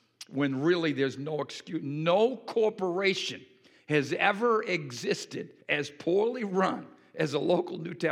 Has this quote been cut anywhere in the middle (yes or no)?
yes